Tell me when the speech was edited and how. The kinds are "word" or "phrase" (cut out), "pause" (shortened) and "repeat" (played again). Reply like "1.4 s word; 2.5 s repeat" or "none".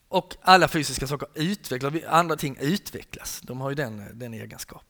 2.4 s word